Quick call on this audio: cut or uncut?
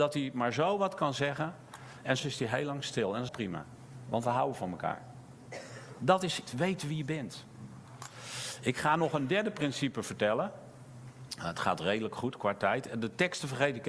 cut